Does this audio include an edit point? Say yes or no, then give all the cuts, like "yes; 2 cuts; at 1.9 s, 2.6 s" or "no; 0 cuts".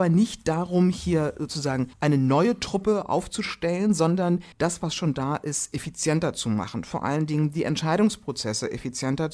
yes; 2 cuts; at 1.9 s, 4.5 s